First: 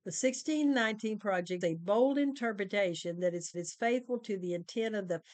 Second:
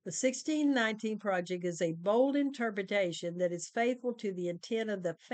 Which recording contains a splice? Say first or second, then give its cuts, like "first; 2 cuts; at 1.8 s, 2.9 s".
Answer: first; 2 cuts; at 1.6 s, 3.5 s